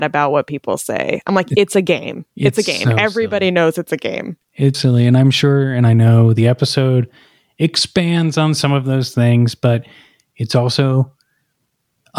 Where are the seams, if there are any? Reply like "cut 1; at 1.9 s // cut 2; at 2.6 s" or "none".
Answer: cut 1; at 4.7 s